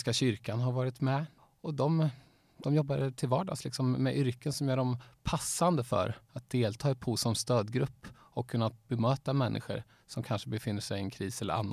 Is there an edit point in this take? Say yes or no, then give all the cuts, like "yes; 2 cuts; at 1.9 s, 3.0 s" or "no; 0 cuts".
no; 0 cuts